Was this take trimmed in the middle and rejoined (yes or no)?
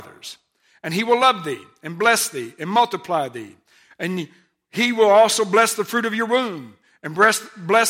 no